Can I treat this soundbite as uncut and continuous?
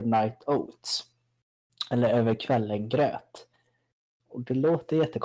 yes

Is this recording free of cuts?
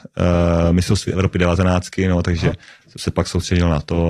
yes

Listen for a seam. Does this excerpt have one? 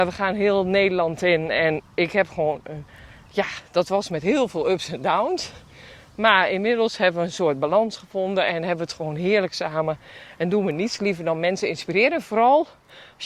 no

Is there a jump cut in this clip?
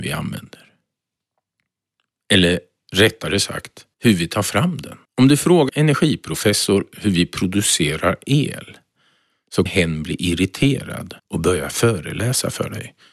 yes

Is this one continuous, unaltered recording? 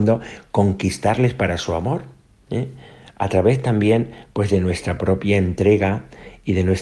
yes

